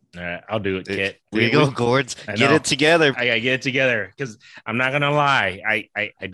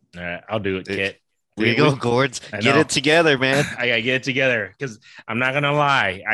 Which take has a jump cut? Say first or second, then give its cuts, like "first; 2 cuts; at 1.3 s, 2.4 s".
first; 2 cuts; at 1.2 s, 3.1 s